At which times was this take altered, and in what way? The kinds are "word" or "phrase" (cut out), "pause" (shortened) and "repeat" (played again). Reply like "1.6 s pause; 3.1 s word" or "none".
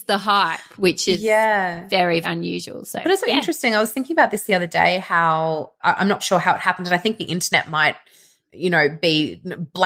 2.2 s word; 3.2 s word; 5.8 s word; 6.2 s word